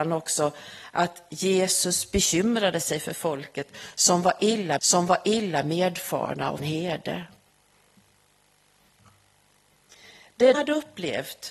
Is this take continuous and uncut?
no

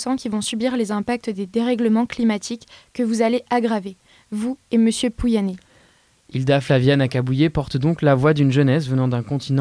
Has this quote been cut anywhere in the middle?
no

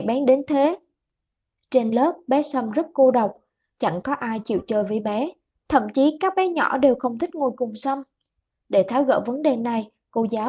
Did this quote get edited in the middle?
no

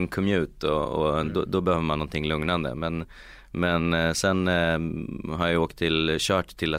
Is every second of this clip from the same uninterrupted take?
yes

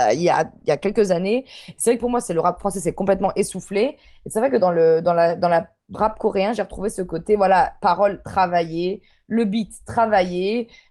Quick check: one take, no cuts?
no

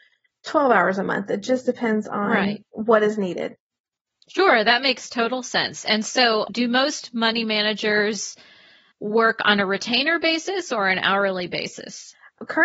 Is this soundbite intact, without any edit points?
yes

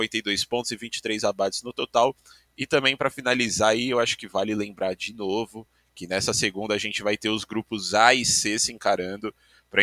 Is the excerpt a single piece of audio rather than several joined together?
yes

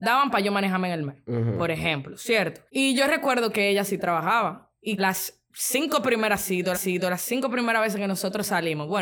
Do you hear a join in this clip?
yes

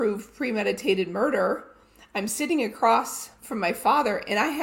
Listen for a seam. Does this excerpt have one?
no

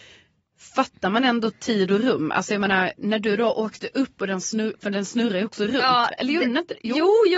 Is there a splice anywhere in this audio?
no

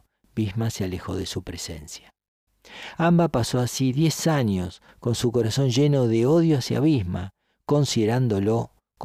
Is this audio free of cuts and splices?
yes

